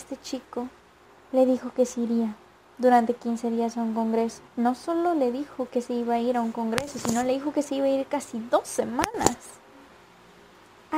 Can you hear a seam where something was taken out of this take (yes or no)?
yes